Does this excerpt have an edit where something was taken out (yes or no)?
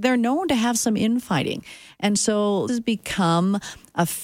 yes